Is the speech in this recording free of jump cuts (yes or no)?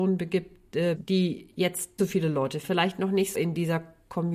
no